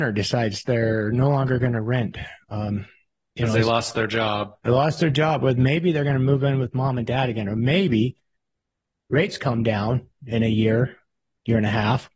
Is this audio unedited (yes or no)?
yes